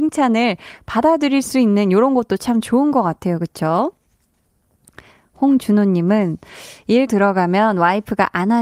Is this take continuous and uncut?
no; 1 cut; at 7.1 s

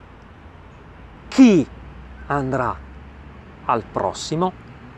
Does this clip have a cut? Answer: yes; 1 cut; at 1.2 s

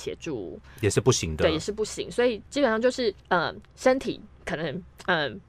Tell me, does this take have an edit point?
yes; 2 cuts; at 2.5 s, 3.2 s

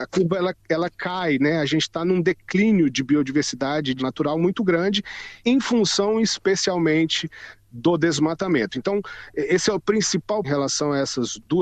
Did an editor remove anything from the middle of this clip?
yes; 3 cuts; at 4.0 s, 5.4 s, 10.4 s

